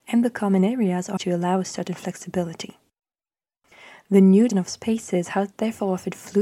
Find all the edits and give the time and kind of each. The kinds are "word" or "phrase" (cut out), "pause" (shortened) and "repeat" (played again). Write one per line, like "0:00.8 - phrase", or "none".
0:01.2 - phrase
0:04.5 - word